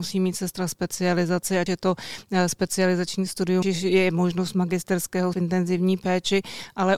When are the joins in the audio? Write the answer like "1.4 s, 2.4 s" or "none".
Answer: 1.7 s, 3.6 s, 5.3 s